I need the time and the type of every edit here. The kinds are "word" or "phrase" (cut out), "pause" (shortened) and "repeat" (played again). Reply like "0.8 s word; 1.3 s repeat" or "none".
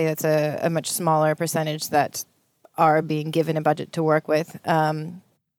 none